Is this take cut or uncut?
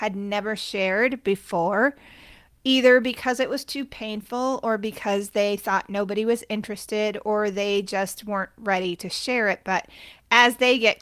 uncut